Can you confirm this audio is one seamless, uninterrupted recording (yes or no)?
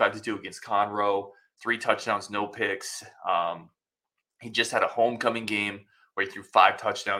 yes